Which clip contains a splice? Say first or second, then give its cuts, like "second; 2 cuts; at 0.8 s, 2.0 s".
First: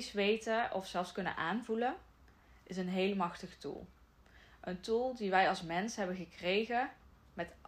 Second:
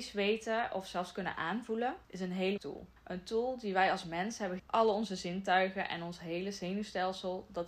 second; 4 cuts; at 2.0 s, 2.6 s, 3.0 s, 4.6 s